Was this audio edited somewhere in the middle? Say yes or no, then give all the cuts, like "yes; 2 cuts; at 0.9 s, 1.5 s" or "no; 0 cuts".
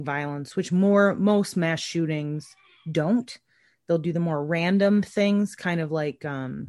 no; 0 cuts